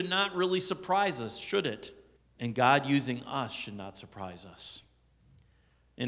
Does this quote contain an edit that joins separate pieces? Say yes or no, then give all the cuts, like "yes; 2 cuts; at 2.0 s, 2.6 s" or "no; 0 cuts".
yes; 1 cut; at 2.2 s